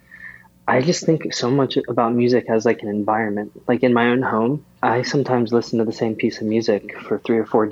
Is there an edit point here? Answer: no; 0 cuts

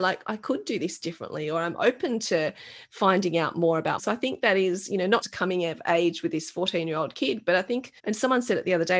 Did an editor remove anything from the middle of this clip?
yes; 3 cuts; at 4.0 s, 5.2 s, 8.0 s

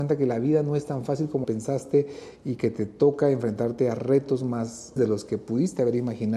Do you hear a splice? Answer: yes; 2 cuts; at 1.4 s, 5.0 s

